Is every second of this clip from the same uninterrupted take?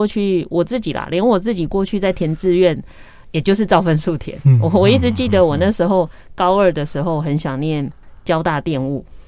yes; 0 cuts

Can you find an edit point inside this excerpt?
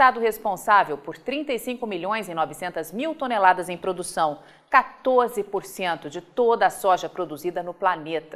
no; 0 cuts

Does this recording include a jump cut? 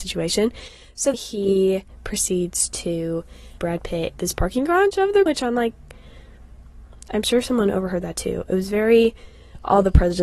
yes; 4 cuts; at 1.1 s, 3.6 s, 4.1 s, 5.3 s

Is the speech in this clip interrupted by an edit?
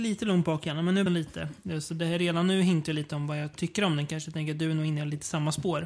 yes; 2 cuts; at 1.1 s, 3.5 s

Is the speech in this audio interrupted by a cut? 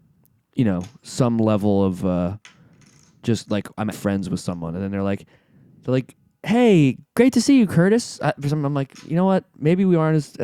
yes; 1 cut; at 3.9 s

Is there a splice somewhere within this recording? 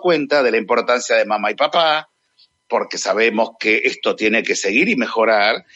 no; 0 cuts

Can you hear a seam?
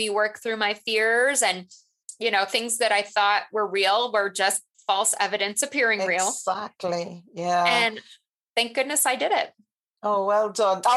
no; 0 cuts

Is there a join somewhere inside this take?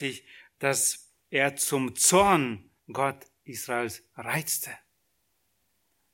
yes; 2 cuts; at 1.2 s, 2.8 s

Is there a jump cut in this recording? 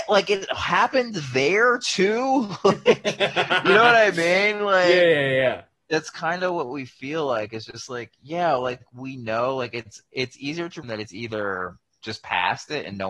yes; 1 cut; at 10.8 s

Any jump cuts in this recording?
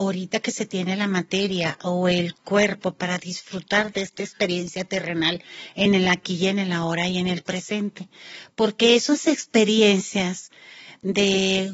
no; 0 cuts

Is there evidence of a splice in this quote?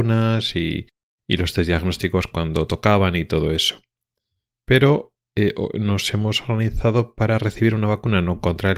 no; 0 cuts

